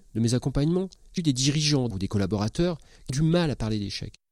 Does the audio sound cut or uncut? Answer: cut